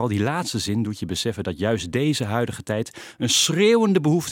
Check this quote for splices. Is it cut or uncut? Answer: uncut